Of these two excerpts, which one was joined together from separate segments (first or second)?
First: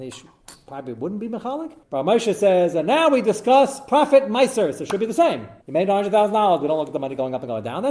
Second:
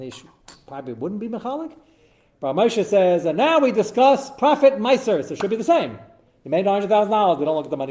first